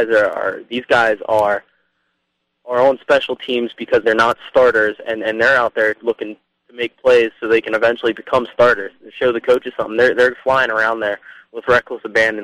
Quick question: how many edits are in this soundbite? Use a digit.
1